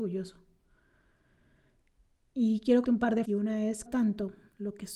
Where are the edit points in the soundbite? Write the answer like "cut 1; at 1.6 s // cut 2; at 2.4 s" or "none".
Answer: cut 1; at 2.8 s // cut 2; at 3.2 s // cut 3; at 3.9 s